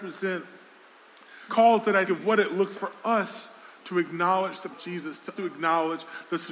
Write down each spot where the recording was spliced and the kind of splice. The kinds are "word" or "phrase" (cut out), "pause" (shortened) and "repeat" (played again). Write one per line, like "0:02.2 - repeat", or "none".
0:01.5 - word
0:02.1 - word
0:02.7 - word
0:04.7 - word
0:05.4 - word